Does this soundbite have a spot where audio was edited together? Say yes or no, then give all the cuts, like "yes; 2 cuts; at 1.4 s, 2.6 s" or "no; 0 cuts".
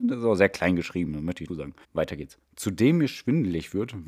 yes; 2 cuts; at 1.5 s, 1.8 s